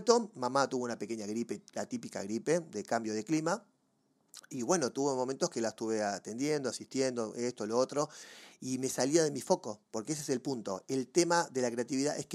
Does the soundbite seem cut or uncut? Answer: uncut